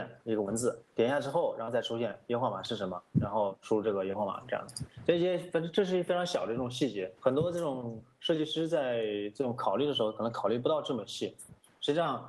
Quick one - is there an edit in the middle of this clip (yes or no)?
yes